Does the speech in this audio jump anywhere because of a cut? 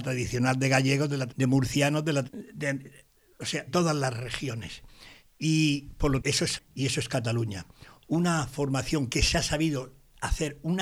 yes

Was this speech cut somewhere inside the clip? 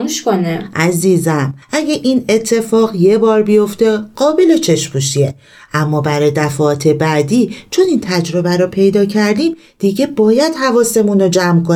yes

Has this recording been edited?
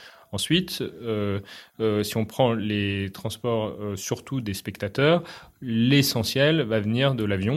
no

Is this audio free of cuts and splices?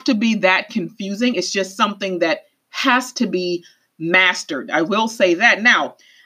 yes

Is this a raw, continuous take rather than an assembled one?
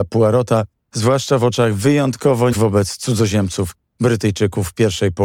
no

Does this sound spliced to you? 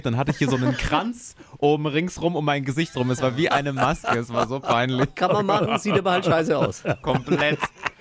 no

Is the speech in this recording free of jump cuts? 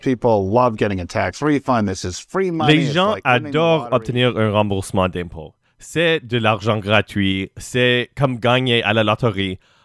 yes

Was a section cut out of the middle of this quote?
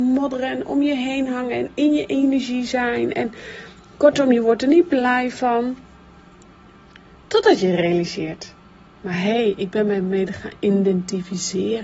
no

